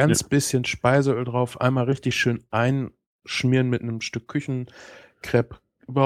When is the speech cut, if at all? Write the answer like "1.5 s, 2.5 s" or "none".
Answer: none